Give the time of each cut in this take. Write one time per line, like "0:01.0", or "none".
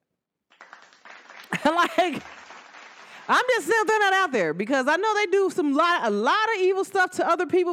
none